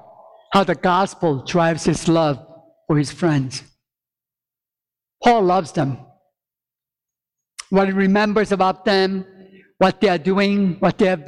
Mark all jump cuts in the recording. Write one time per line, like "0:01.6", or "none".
none